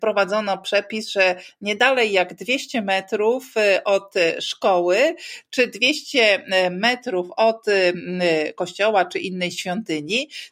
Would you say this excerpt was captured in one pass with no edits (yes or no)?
yes